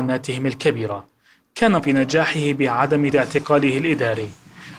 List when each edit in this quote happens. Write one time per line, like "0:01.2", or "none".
0:01.8
0:03.1